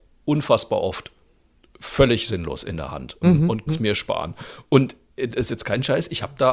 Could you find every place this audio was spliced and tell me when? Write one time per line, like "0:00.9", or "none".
0:03.2
0:03.7